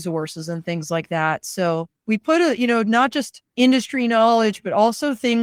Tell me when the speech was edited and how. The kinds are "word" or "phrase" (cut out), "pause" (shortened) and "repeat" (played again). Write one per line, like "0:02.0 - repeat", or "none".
0:02.0 - pause
0:03.4 - pause